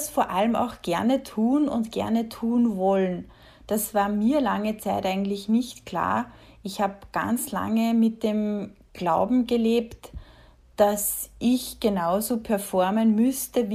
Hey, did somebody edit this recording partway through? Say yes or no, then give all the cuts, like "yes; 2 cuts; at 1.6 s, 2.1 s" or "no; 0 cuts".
no; 0 cuts